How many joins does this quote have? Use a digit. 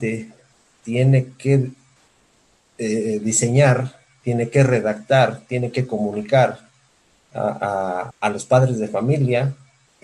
1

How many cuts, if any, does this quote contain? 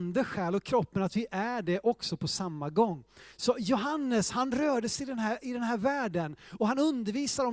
0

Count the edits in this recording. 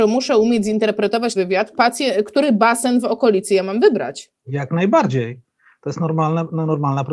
2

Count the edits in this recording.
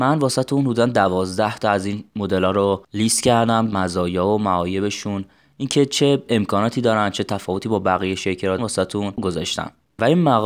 2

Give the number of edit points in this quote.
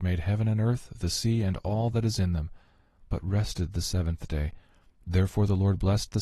0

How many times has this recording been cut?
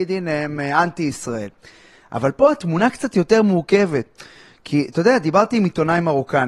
0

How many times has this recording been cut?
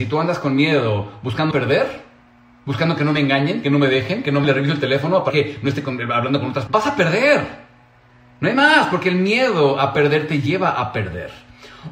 4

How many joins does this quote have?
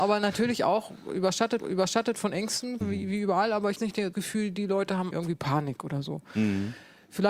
5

